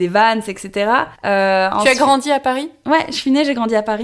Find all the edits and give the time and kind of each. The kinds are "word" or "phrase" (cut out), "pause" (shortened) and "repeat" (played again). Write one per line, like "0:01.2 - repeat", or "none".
0:01.1 - pause

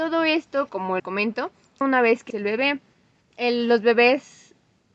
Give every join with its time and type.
0:01.0 - word
0:01.8 - phrase
0:02.3 - word

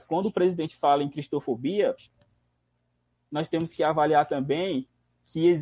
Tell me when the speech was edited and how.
none

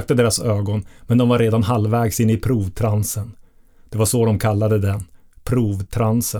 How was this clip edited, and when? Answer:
none

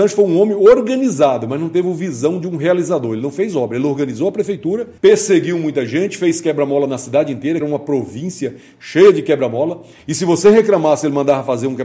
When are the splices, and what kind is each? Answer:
0:05.0 - pause
0:07.6 - phrase

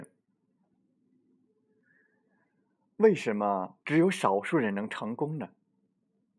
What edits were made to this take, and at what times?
0:03.8 - pause

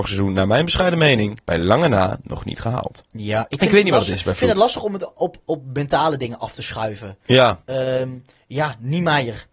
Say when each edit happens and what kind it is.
0:01.4 - pause
0:03.1 - pause

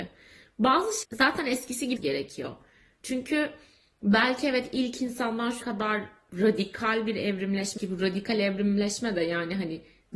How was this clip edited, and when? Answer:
0:01.0 - word
0:02.0 - word
0:05.6 - word
0:07.8 - word

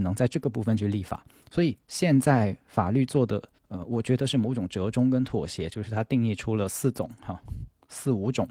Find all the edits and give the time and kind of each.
0:03.6 - pause

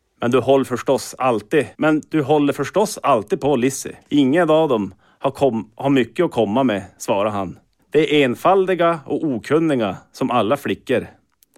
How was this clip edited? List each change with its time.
0:01.7 - pause
0:04.0 - pause
0:07.8 - pause

